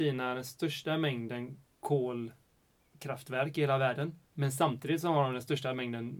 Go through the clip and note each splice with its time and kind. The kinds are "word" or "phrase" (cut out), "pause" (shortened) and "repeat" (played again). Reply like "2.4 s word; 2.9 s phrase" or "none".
4.2 s pause